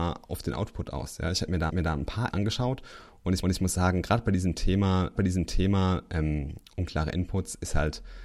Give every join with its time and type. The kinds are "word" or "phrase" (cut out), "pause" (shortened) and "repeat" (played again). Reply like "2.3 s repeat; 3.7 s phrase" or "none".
1.7 s repeat; 2.3 s word; 3.4 s repeat; 5.2 s repeat